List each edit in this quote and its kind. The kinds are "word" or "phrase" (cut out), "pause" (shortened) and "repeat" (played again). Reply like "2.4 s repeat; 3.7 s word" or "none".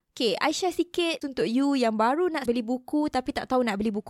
1.2 s word; 2.5 s word